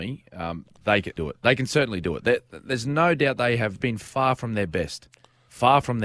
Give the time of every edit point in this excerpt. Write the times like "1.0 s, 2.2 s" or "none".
1.2 s, 3.8 s